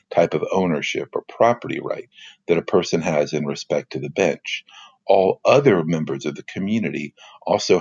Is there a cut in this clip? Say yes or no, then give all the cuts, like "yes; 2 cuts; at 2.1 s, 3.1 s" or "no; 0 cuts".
no; 0 cuts